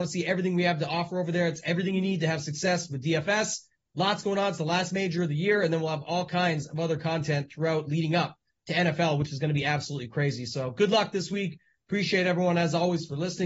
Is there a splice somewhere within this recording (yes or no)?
no